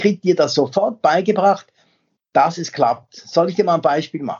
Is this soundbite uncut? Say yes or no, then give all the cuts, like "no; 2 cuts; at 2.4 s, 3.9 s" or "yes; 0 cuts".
yes; 0 cuts